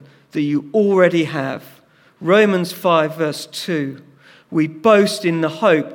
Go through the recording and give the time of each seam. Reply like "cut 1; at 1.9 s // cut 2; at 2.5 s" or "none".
none